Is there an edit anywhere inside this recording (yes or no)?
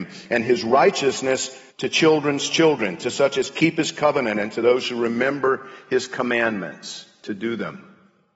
yes